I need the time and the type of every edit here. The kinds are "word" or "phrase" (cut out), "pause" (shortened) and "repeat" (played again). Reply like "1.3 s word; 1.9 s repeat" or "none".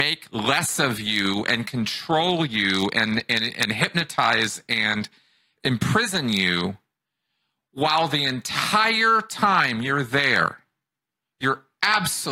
none